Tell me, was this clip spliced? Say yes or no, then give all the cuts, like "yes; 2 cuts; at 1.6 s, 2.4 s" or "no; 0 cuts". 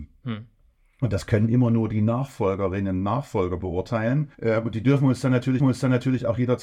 yes; 2 cuts; at 4.3 s, 5.6 s